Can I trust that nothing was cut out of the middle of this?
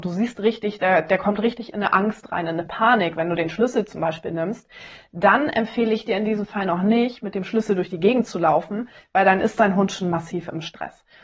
yes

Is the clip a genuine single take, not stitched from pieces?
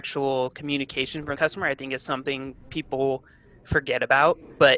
no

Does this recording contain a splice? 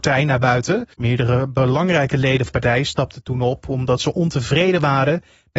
yes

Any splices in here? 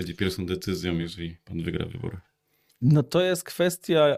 no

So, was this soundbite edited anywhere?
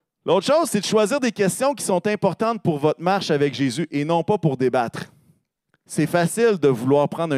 no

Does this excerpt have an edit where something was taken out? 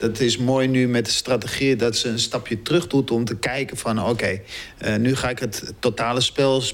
no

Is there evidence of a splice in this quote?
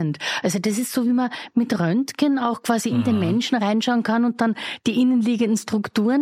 no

